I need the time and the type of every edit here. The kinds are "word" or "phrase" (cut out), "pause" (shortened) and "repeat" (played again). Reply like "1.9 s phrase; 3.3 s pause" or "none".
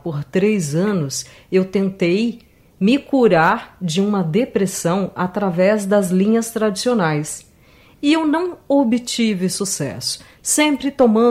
none